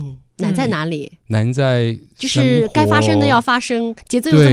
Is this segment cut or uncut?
uncut